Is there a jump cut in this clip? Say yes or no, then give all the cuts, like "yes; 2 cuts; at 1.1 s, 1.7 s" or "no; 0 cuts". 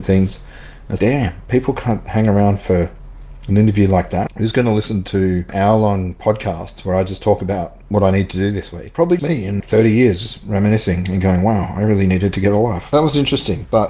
yes; 4 cuts; at 1.0 s, 7.8 s, 9.2 s, 9.6 s